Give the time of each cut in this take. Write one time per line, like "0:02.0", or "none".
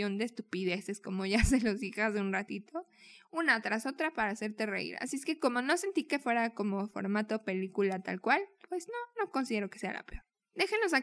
0:08.6

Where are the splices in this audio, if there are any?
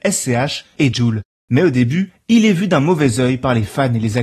0:00.9

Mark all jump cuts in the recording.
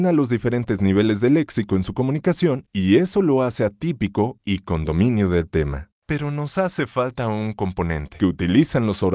0:06.0

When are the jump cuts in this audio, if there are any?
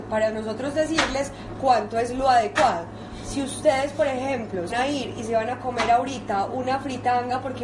0:04.7

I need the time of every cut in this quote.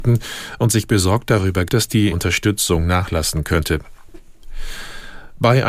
0:01.7
0:02.1

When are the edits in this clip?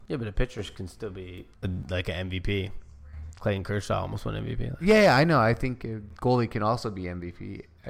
0:01.5

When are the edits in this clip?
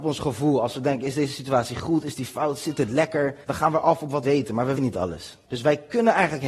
0:03.4
0:04.2
0:04.8
0:05.4

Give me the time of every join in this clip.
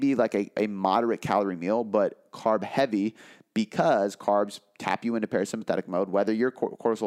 none

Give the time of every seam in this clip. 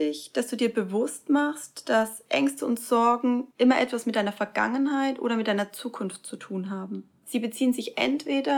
0:03.5

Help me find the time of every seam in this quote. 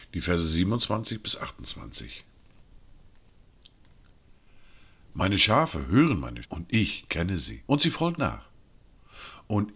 0:06.4
0:07.6
0:08.2

